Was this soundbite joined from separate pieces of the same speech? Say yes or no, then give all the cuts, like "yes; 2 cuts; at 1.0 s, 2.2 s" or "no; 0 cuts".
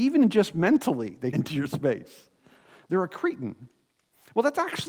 yes; 1 cut; at 1.3 s